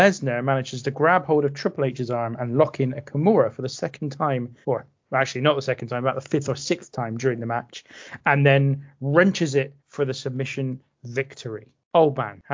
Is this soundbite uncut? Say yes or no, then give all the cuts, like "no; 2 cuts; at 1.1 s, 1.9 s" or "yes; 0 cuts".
no; 2 cuts; at 4.6 s, 9.8 s